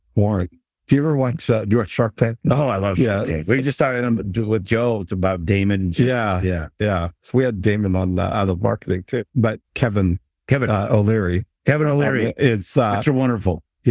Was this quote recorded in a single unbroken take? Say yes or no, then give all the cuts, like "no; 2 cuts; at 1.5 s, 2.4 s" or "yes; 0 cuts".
no; 1 cut; at 9.3 s